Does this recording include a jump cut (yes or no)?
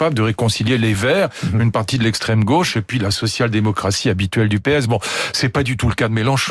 no